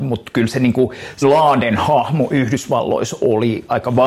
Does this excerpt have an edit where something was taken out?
yes; 1 cut; at 1.2 s

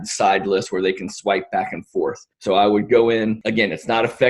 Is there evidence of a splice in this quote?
yes; 1 cut; at 2.3 s

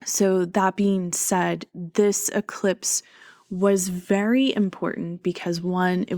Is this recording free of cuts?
yes; 0 cuts

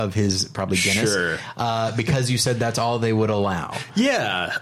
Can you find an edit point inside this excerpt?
no; 0 cuts

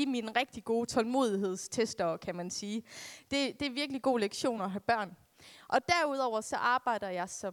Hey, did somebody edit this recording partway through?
no; 0 cuts

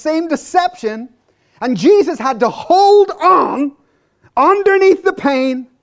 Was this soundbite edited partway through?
no; 0 cuts

